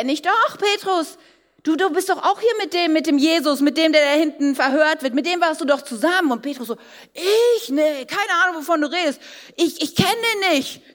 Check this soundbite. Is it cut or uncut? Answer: uncut